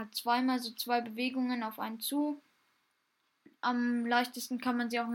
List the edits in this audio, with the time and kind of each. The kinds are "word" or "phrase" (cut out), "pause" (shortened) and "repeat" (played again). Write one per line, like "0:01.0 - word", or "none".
none